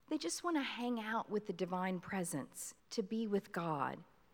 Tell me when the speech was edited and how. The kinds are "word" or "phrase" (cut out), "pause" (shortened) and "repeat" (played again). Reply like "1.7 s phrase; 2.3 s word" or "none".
2.8 s pause